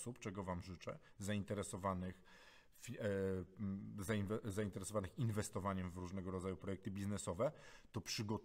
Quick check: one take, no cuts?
yes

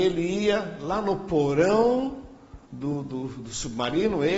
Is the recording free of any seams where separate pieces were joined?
no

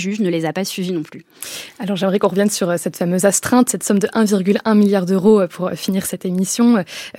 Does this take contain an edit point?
no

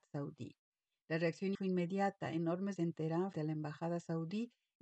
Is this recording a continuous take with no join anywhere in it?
no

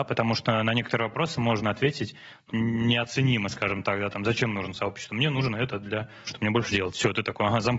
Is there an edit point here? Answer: yes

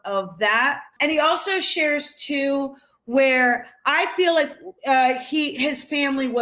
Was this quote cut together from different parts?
no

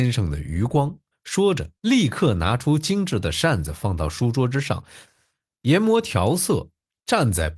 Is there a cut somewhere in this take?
yes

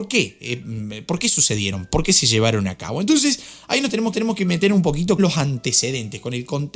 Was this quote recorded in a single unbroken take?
no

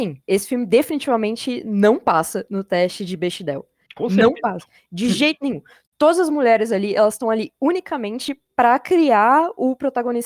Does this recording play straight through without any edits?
yes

